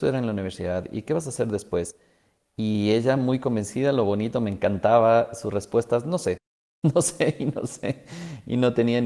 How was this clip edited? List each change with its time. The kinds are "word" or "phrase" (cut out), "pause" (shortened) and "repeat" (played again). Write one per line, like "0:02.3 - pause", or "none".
none